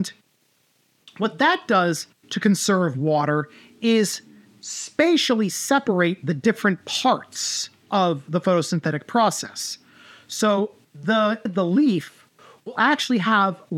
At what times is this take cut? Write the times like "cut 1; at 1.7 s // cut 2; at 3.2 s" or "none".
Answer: cut 1; at 11.5 s